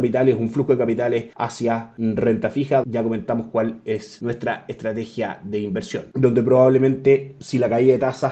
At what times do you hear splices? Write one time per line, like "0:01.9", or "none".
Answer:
0:02.8